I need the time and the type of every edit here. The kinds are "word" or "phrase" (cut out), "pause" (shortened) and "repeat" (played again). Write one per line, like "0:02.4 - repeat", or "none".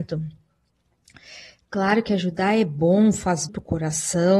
0:03.5 - word